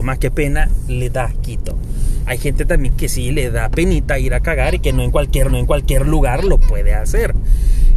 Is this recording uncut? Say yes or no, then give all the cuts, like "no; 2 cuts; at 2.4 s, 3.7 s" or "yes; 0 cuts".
no; 1 cut; at 5.5 s